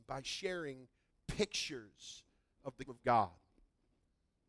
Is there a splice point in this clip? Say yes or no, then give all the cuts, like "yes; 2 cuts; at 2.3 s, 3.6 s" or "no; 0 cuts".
yes; 1 cut; at 2.9 s